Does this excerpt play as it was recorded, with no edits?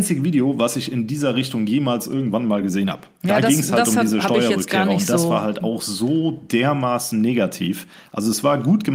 yes; 0 cuts

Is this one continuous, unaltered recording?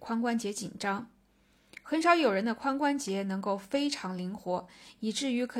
yes; 0 cuts

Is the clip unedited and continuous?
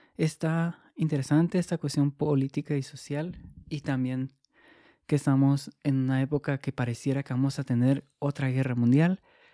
yes; 0 cuts

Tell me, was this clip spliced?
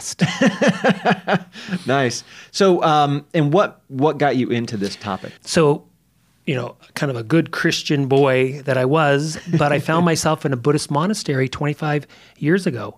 yes; 1 cut; at 5.4 s

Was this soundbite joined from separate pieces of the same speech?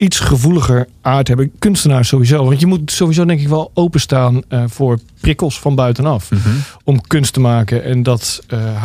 no; 0 cuts

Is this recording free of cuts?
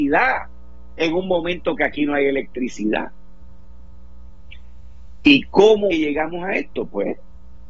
no; 1 cut; at 5.9 s

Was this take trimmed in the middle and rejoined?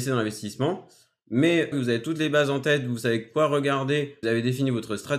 yes; 2 cuts; at 1.7 s, 4.2 s

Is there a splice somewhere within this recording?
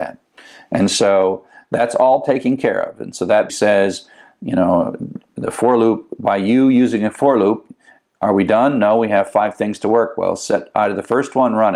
yes; 1 cut; at 3.5 s

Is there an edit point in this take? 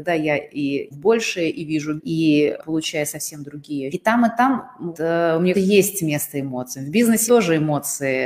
yes; 7 cuts; at 0.9 s, 2.0 s, 2.6 s, 3.9 s, 4.9 s, 5.5 s, 7.3 s

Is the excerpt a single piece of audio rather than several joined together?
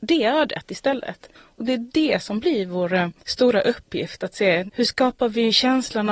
no; 2 cuts; at 1.4 s, 3.2 s

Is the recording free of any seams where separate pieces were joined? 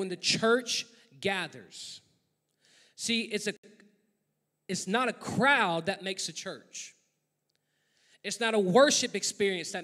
yes; 0 cuts

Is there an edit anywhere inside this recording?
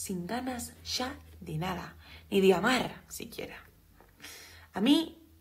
no; 0 cuts

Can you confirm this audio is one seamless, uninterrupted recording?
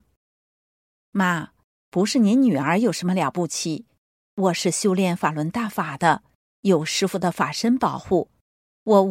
yes; 0 cuts

